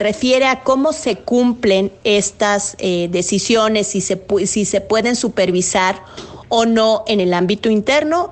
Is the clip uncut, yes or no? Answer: yes